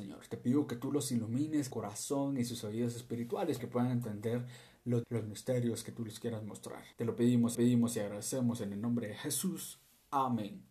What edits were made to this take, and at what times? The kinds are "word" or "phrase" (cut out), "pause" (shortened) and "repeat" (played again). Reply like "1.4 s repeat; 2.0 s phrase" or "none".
1.7 s phrase; 3.6 s word; 5.0 s word; 6.9 s pause; 7.5 s repeat